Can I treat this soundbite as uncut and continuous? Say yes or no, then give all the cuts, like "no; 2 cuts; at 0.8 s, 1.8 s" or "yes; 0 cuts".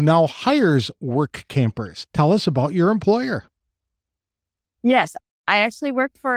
no; 1 cut; at 2.1 s